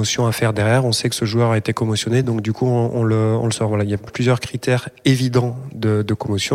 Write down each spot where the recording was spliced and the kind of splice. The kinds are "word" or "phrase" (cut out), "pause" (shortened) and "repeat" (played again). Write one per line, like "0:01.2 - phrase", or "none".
none

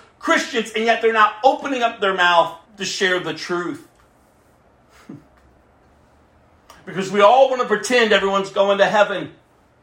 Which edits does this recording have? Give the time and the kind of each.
0:02.7 - pause

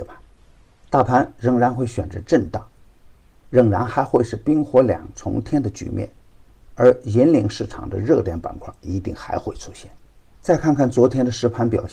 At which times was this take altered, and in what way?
none

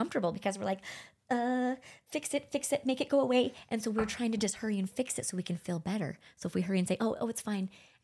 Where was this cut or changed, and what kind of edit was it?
none

